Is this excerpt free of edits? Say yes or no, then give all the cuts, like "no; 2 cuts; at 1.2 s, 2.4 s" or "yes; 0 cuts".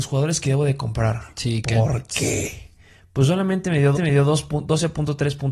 no; 2 cuts; at 1.3 s, 3.9 s